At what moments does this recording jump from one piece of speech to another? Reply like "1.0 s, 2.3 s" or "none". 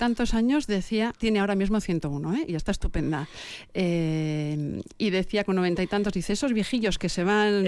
1.1 s

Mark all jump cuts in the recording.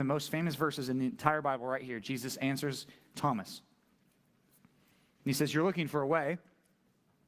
none

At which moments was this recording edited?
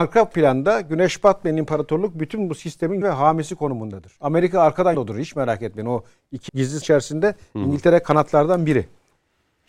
3.0 s, 4.2 s, 4.9 s, 6.5 s, 6.8 s

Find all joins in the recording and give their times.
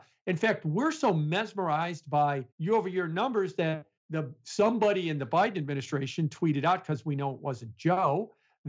2.5 s, 4.0 s

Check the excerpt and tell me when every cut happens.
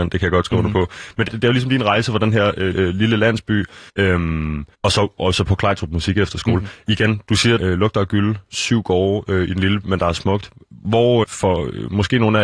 1.3 s, 2.7 s, 3.9 s, 4.7 s, 7.6 s, 9.8 s, 11.2 s

